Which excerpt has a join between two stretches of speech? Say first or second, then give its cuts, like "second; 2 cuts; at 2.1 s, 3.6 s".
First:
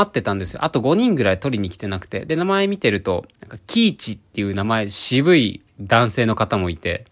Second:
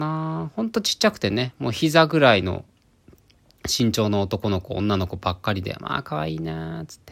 first; 1 cut; at 3.3 s